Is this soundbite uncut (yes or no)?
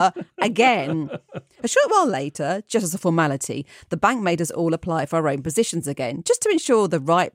yes